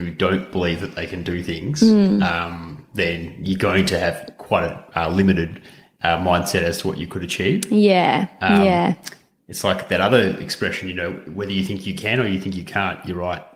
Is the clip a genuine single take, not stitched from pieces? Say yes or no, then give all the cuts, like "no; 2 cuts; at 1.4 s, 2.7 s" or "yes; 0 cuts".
yes; 0 cuts